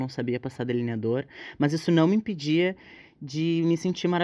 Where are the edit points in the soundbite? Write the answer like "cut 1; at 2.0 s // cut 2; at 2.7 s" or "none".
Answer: none